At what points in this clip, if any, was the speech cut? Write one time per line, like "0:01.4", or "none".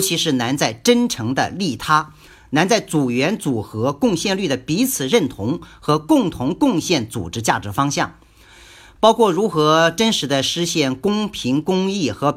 none